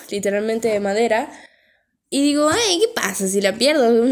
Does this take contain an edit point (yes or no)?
no